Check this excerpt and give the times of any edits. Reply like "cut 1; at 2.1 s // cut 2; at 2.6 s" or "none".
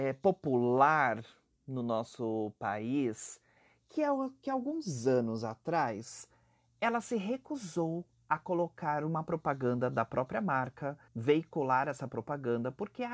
cut 1; at 11.1 s